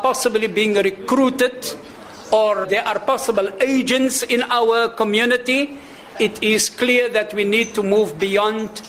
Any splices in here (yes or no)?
yes